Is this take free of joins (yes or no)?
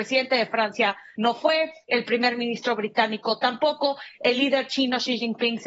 yes